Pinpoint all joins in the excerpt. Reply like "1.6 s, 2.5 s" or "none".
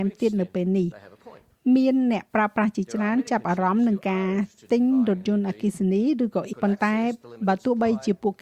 6.5 s